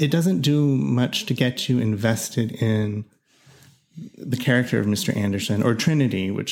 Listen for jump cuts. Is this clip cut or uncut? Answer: uncut